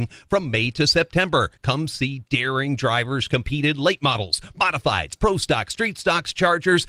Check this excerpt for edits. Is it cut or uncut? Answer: cut